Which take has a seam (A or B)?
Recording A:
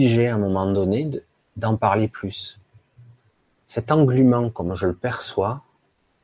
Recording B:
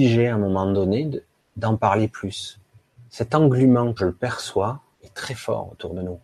B